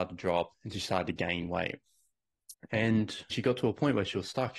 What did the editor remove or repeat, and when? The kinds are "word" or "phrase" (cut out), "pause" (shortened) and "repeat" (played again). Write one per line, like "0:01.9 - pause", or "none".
0:03.3 - word